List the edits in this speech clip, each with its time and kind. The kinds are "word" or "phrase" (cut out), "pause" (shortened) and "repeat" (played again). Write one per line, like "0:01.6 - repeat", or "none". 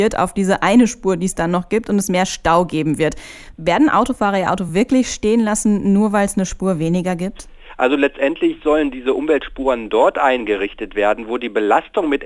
none